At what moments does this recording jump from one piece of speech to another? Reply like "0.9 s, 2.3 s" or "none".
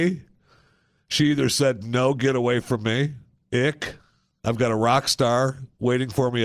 none